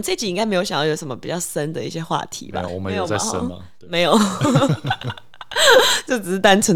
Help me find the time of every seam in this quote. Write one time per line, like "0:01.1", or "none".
0:02.7